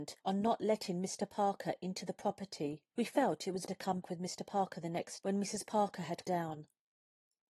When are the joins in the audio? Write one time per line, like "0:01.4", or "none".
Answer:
0:03.7
0:04.0
0:05.2
0:06.2

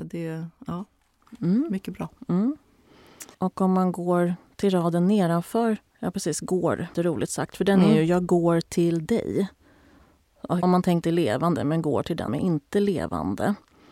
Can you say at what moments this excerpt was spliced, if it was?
0:03.3
0:05.9
0:06.9
0:10.6
0:11.0
0:12.3

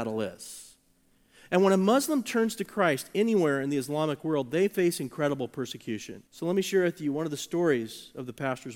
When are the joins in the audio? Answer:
0:06.3

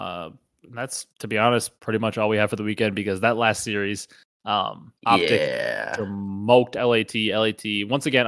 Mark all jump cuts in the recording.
0:01.1
0:01.8
0:05.0

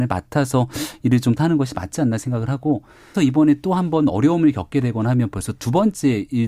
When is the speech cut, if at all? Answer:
0:01.4
0:03.1

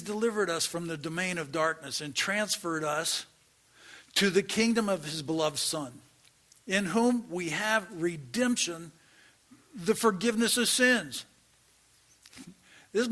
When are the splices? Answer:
none

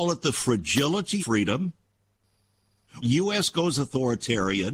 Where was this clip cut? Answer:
0:01.2
0:03.0

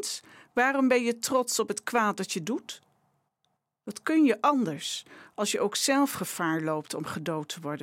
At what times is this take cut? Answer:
none

